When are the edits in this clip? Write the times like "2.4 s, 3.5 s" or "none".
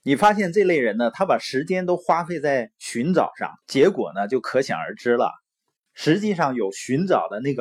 3.6 s